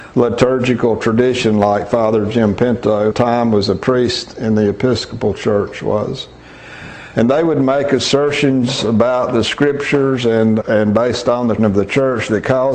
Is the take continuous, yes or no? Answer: no